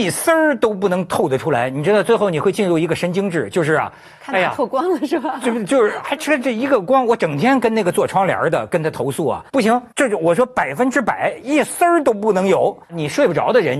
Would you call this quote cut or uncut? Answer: cut